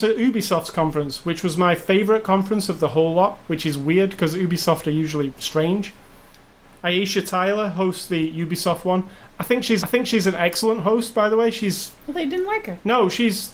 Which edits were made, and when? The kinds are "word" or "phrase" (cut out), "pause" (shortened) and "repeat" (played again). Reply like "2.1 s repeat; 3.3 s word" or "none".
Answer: 5.3 s word; 9.8 s repeat; 12.0 s pause